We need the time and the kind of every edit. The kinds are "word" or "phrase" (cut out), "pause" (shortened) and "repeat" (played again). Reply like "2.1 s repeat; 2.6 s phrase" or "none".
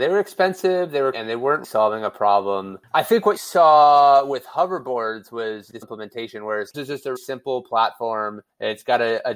1.1 s word; 1.6 s word; 3.4 s word; 5.8 s word; 6.7 s word; 7.1 s word